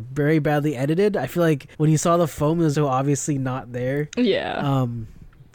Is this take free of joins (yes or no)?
no